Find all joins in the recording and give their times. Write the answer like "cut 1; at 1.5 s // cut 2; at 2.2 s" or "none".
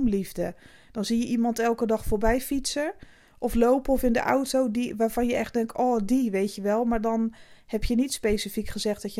none